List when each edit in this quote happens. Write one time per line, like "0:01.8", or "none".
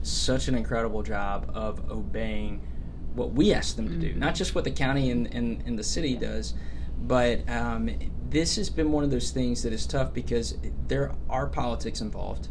none